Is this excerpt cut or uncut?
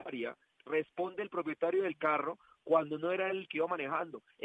uncut